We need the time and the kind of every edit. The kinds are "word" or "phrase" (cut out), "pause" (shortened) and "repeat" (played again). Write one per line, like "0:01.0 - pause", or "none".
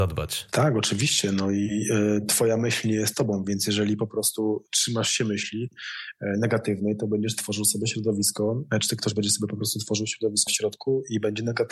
0:10.5 - word